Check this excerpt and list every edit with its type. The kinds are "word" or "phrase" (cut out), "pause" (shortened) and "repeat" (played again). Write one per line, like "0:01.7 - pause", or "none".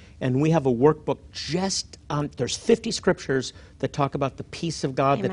none